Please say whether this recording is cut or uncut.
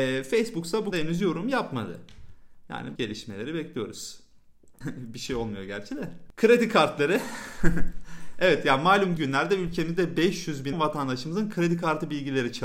cut